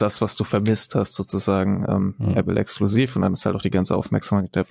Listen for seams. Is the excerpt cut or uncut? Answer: uncut